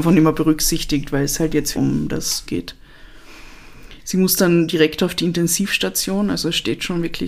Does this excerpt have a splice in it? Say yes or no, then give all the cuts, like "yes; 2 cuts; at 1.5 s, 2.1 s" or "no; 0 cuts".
yes; 2 cuts; at 1.7 s, 2.4 s